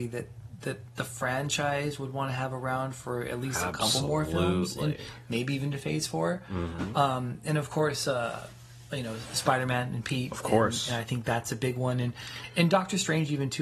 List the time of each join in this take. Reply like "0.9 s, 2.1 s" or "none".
none